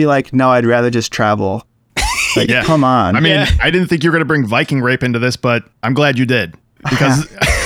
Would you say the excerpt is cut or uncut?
uncut